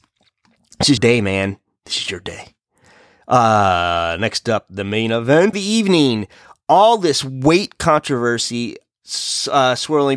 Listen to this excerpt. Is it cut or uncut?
cut